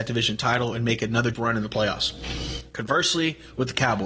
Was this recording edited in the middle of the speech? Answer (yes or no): yes